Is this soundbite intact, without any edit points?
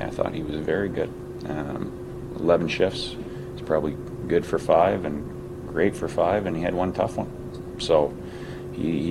yes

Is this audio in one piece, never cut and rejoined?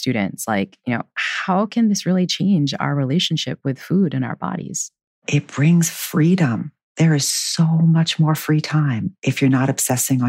yes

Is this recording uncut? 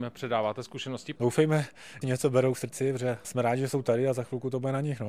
no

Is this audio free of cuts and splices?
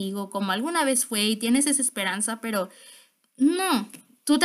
yes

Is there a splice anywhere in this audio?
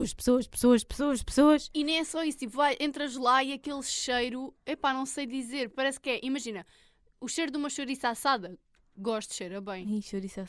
no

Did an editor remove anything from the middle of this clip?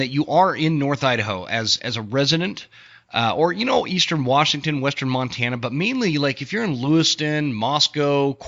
no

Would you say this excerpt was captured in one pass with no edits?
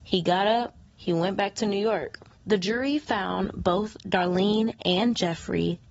yes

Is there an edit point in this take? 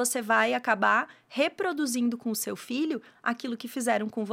no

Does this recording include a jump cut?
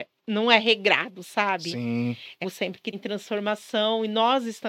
yes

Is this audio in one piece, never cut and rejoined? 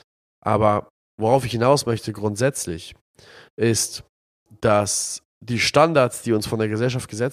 yes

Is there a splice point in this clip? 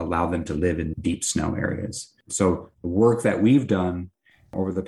yes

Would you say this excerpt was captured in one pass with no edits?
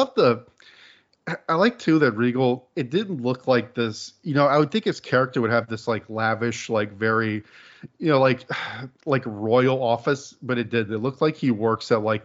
no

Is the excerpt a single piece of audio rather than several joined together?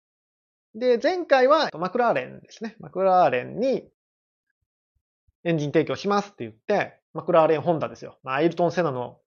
no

